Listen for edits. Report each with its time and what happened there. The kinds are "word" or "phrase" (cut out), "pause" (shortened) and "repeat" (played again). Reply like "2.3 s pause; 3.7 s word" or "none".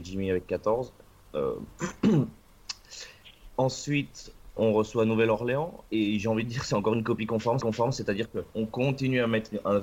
4.6 s word; 7.6 s repeat; 8.5 s pause